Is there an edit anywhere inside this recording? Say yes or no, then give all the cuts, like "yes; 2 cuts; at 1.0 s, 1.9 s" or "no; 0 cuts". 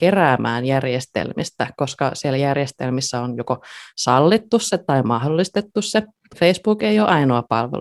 no; 0 cuts